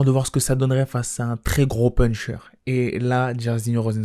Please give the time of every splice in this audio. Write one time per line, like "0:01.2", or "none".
none